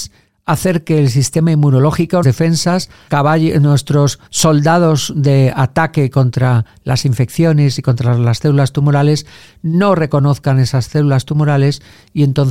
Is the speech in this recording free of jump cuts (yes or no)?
no